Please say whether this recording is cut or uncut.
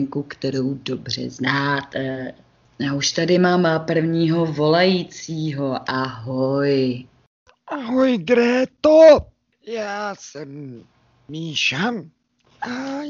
uncut